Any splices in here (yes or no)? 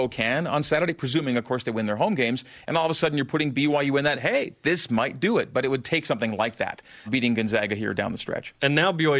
yes